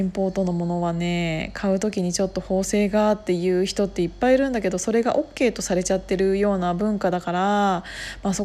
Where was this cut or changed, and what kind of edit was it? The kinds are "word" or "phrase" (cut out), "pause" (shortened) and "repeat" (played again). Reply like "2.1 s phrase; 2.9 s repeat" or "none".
none